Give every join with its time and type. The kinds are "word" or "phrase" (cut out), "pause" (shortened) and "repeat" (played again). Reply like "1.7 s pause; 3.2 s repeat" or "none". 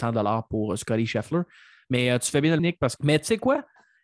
2.6 s word; 3.0 s word